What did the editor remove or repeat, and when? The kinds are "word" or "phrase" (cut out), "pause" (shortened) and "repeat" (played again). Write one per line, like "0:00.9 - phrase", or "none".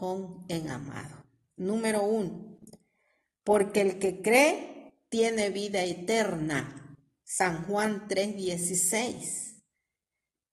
none